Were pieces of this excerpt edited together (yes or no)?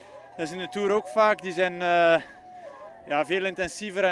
no